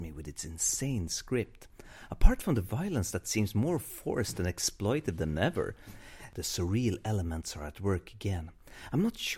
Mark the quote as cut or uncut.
uncut